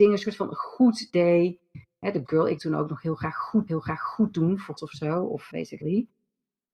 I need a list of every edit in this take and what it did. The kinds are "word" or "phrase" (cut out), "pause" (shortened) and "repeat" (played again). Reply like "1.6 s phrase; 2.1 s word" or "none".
2.2 s word; 2.6 s word; 3.7 s repeat; 4.8 s word; 5.5 s word; 5.8 s word